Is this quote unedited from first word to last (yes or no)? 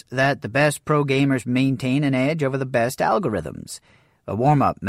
yes